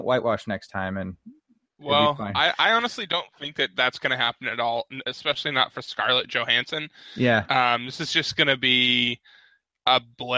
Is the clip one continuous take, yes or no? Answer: yes